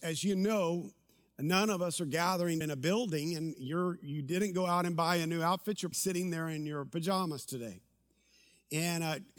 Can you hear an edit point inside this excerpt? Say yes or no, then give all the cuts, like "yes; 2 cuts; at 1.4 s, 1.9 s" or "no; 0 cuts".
yes; 2 cuts; at 2.6 s, 5.9 s